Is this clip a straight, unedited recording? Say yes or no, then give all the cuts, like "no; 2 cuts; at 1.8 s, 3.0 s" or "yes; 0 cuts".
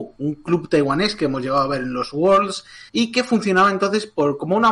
no; 1 cut; at 2.9 s